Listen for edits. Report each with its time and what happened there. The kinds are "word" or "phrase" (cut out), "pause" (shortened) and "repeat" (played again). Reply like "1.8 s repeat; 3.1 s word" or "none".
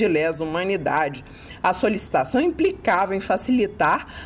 none